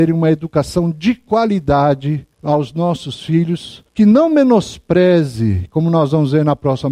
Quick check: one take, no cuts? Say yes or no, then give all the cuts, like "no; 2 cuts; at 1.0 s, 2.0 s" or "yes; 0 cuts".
no; 2 cuts; at 2.3 s, 3.9 s